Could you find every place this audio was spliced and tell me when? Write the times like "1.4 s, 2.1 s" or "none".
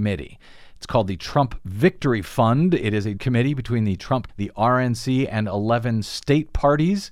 3.2 s, 4.3 s